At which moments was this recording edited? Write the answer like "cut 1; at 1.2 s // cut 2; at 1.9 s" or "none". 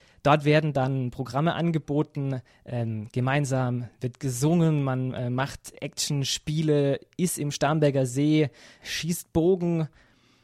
none

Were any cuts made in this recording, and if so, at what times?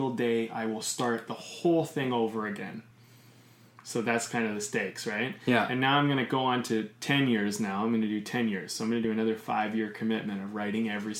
none

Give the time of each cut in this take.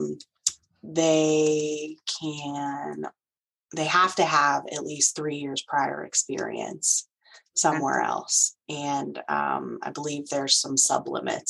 none

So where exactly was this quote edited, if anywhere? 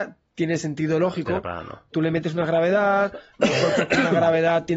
cut 1; at 1.9 s

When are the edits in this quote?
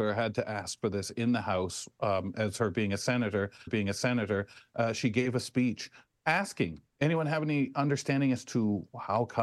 cut 1; at 3.7 s // cut 2; at 6.9 s

